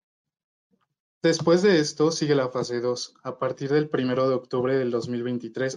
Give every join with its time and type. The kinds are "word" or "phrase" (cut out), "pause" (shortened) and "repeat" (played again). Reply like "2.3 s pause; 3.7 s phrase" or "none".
none